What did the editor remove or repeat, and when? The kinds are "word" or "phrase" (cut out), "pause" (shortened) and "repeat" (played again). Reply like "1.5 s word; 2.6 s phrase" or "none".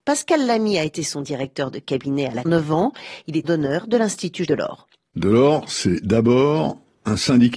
2.4 s phrase; 3.4 s phrase; 4.4 s word

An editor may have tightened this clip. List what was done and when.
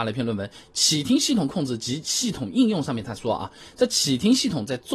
none

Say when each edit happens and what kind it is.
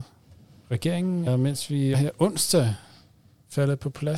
1.3 s word; 1.9 s word

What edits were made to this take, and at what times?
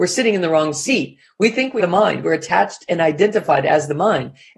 1.8 s word

